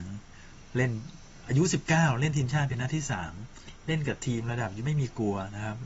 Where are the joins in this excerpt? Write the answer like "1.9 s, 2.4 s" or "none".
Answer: 4.8 s

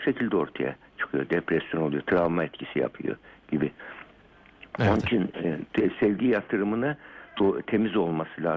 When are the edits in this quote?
none

